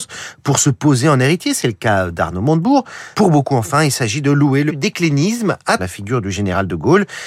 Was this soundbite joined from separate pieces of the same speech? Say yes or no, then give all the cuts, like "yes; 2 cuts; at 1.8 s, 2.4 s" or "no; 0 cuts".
yes; 3 cuts; at 3.1 s, 4.7 s, 5.8 s